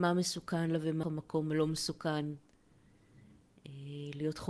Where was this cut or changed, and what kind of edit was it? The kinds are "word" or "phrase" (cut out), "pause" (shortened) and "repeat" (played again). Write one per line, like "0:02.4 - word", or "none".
0:01.0 - phrase